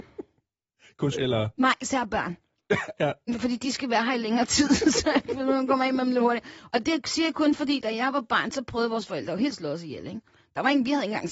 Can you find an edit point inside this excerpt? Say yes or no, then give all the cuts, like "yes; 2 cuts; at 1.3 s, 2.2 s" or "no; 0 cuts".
yes; 2 cuts; at 1.1 s, 9.5 s